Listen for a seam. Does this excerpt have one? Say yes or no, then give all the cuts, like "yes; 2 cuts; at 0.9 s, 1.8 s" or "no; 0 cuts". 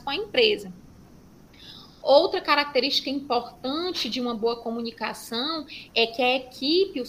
yes; 1 cut; at 1.9 s